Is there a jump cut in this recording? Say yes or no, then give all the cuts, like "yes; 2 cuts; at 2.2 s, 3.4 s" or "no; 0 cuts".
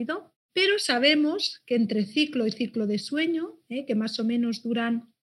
no; 0 cuts